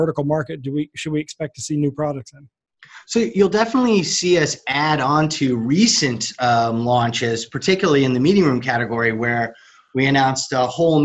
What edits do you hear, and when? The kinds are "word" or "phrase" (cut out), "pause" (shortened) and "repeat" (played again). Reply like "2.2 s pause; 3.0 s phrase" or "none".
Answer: none